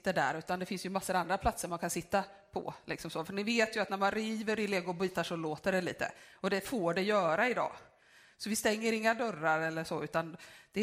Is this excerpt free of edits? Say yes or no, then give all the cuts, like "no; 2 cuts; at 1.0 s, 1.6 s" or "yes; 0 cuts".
yes; 0 cuts